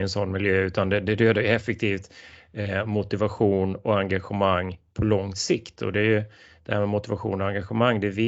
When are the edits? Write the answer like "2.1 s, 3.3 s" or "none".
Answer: none